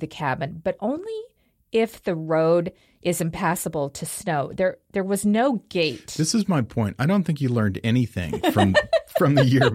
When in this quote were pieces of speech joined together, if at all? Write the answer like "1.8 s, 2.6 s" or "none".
none